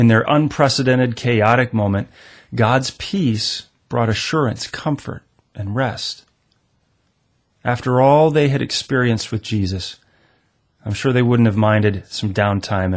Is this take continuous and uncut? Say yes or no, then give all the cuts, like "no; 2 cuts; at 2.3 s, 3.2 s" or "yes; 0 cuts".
yes; 0 cuts